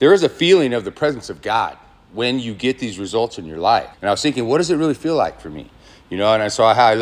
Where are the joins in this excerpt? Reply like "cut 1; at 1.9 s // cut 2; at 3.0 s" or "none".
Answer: cut 1; at 3.9 s